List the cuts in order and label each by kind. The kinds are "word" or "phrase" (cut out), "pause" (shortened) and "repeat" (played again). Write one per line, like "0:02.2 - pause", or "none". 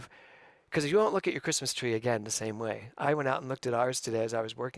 0:03.0 - word

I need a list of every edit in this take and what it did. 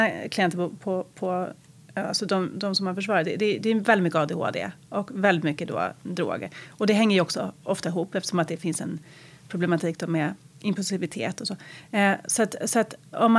none

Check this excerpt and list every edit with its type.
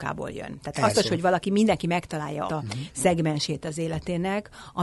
0:00.9 - word
0:02.5 - word

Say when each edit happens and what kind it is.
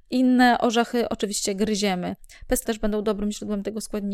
0:02.7 - word

